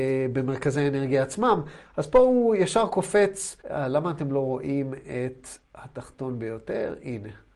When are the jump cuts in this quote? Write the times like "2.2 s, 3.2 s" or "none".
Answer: 3.6 s, 5.6 s